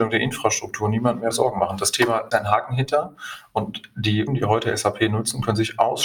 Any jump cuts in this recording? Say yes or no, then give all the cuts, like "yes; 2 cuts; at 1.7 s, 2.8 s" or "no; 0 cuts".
yes; 2 cuts; at 2.3 s, 4.3 s